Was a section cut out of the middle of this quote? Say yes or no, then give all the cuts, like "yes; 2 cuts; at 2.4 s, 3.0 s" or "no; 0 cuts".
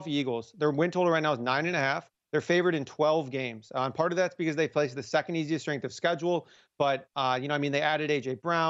no; 0 cuts